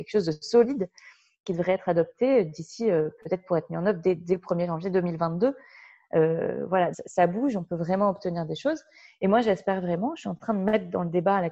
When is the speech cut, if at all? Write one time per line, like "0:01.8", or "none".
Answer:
0:06.9

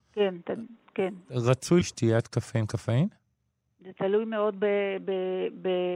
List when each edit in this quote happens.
0:01.8

